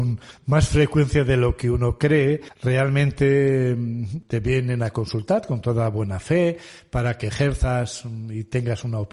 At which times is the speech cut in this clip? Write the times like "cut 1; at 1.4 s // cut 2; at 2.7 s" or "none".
none